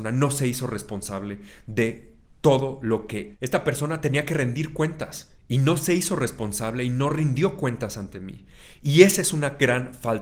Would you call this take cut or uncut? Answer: cut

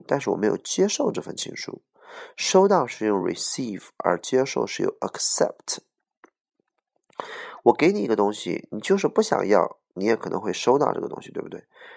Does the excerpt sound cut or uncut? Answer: uncut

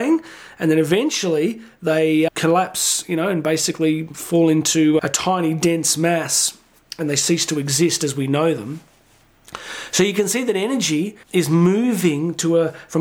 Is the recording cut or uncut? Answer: cut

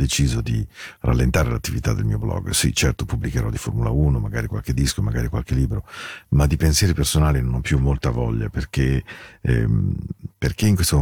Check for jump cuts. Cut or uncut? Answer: uncut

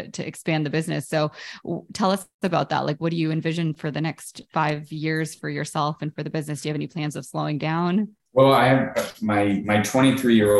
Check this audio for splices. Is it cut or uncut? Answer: cut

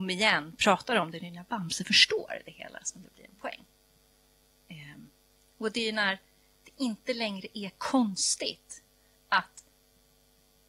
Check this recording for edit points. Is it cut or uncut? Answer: uncut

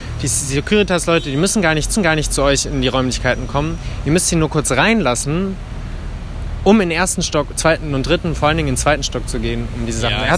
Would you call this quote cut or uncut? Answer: cut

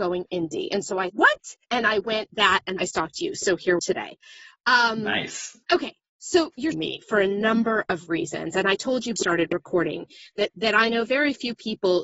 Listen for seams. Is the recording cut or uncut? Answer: cut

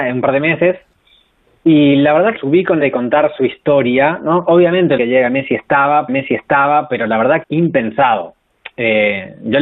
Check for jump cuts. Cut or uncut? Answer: cut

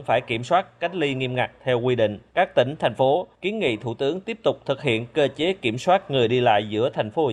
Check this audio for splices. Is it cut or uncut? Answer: cut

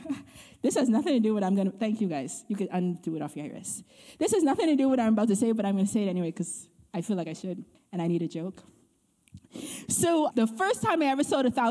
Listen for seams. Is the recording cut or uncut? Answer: cut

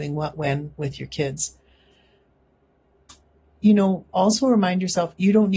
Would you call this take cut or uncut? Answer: uncut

